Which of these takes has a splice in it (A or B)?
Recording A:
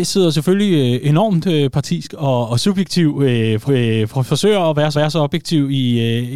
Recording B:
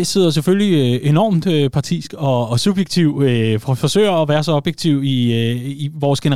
A